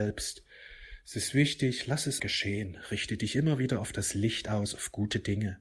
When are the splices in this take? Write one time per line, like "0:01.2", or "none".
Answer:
0:02.2